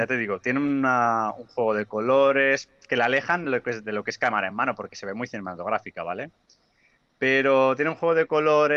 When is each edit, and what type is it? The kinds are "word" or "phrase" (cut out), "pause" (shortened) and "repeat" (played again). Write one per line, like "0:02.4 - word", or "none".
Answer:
none